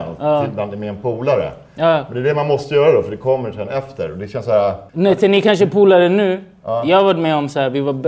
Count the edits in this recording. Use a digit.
1